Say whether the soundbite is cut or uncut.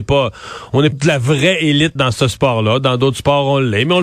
cut